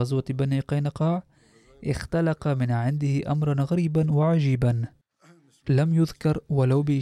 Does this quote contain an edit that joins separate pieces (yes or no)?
no